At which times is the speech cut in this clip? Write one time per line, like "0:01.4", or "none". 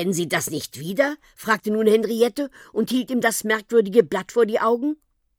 none